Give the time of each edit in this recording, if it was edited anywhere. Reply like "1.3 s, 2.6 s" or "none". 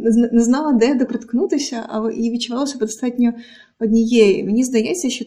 1.1 s